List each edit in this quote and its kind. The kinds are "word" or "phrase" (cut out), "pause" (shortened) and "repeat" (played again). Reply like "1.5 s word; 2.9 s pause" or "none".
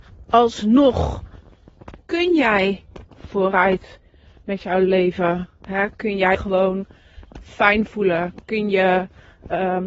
3.1 s word; 6.3 s word